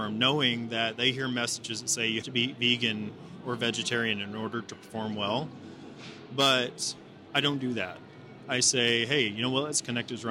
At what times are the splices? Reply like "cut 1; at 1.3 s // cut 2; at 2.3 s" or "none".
cut 1; at 2.2 s